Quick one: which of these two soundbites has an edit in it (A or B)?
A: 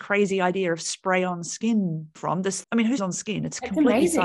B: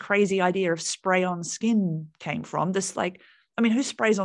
A